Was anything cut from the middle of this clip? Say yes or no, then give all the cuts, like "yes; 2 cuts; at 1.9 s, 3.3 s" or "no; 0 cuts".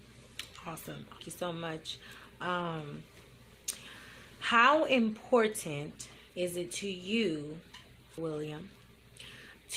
yes; 3 cuts; at 1.2 s, 6.3 s, 8.2 s